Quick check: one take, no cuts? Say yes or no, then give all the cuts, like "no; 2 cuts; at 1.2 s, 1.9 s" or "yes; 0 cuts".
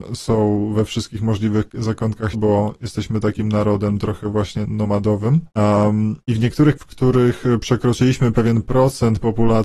no; 3 cuts; at 2.3 s, 4.7 s, 6.8 s